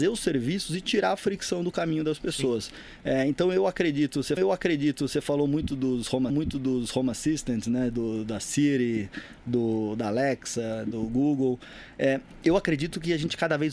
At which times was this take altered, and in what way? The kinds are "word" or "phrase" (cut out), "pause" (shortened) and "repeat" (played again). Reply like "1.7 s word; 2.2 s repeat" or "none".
4.4 s repeat; 6.3 s repeat